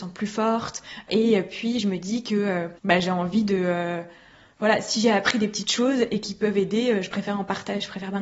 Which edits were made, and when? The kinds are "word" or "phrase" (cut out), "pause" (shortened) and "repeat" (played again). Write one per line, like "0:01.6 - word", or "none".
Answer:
0:02.8 - pause